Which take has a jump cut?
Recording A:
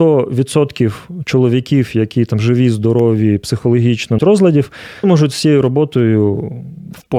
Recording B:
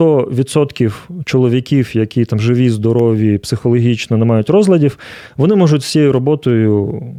A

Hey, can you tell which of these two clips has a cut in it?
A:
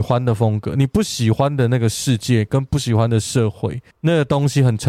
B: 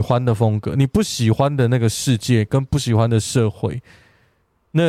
A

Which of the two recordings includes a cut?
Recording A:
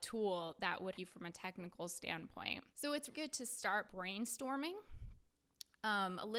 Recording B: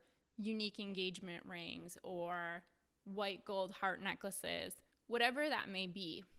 A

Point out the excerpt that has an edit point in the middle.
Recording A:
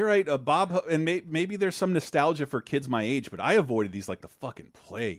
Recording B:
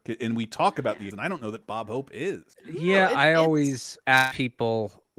B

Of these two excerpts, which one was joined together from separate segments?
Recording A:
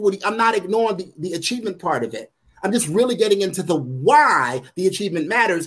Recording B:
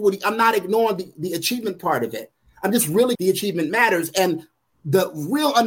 B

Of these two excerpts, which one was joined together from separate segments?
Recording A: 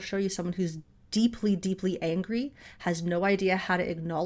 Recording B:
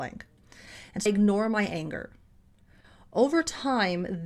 B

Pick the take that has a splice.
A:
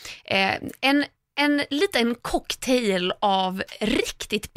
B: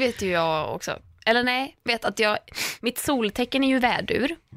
B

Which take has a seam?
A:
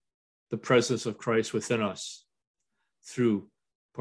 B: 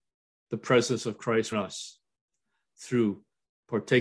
B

